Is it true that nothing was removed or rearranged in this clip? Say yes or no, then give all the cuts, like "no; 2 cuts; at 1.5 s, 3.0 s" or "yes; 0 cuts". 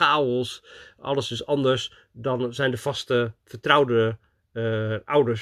yes; 0 cuts